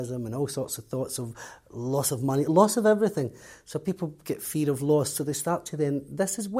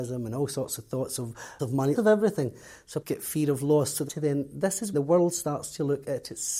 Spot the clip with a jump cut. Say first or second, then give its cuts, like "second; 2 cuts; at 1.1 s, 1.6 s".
second; 5 cuts; at 1.6 s, 2.0 s, 3.0 s, 4.1 s, 4.9 s